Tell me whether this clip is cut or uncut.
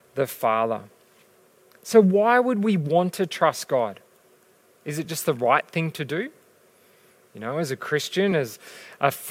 uncut